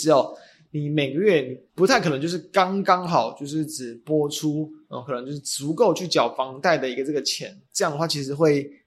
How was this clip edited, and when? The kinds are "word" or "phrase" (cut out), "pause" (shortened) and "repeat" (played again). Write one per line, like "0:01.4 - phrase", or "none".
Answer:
0:01.7 - pause